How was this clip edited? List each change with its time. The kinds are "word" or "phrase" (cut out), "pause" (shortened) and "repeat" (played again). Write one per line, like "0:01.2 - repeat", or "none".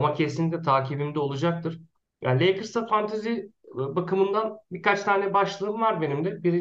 0:01.9 - pause